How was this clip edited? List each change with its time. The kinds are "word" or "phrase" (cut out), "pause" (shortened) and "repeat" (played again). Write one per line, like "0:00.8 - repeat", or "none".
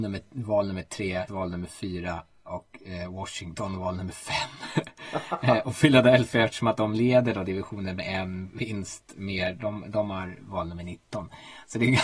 0:01.3 - word

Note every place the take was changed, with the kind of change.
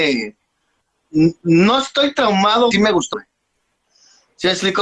0:02.7 - phrase
0:03.1 - phrase

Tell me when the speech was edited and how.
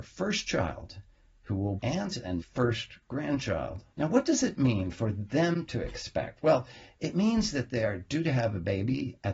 0:01.8 - word
0:02.4 - word
0:03.9 - pause

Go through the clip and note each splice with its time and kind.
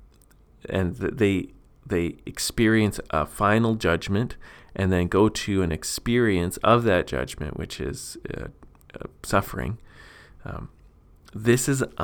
none

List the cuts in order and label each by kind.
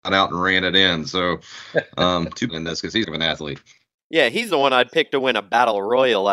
0:02.5 - phrase
0:03.0 - phrase

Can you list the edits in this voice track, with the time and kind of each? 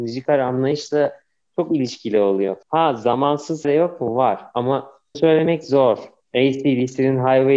0:02.6 - pause
0:03.6 - word
0:05.1 - word

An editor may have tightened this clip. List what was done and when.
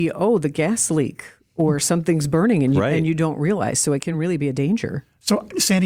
none

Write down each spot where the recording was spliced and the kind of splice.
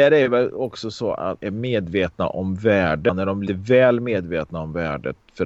0:01.4 - word
0:03.5 - word

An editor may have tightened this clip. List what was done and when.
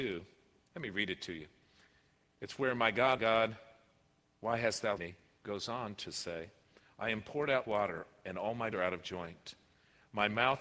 0:03.2 - word
0:05.0 - word
0:07.6 - word
0:08.7 - word

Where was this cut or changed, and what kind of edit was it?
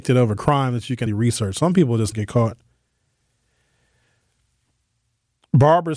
0:01.1 - word
0:02.1 - word

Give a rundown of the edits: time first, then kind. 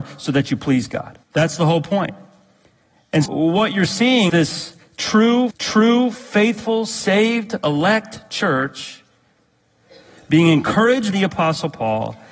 0:01.2 - pause
0:03.3 - word
0:04.3 - word
0:05.5 - repeat
0:11.1 - word

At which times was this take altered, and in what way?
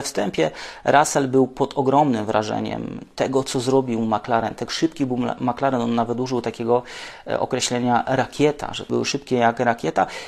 0:04.7 - word
0:08.9 - word

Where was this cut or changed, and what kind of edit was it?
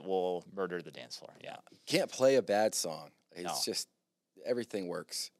none

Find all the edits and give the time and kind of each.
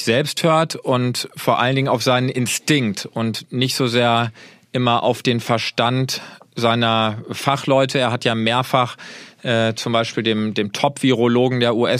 none

